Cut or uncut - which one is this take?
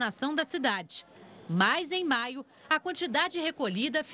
uncut